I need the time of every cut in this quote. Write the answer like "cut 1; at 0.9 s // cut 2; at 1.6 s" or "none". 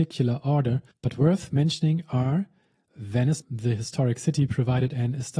cut 1; at 0.9 s // cut 2; at 3.4 s